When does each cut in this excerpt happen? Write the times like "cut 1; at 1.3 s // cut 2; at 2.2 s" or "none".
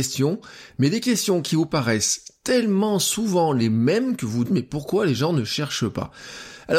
cut 1; at 4.4 s